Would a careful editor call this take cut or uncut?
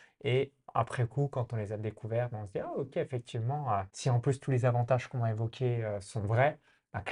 cut